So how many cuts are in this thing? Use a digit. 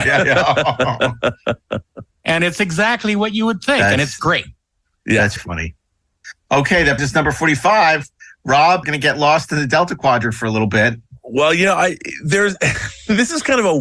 3